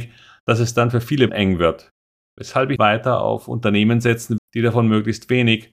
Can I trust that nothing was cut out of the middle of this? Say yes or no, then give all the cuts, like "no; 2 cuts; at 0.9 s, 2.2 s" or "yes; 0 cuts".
no; 4 cuts; at 1.3 s, 2.1 s, 2.8 s, 4.4 s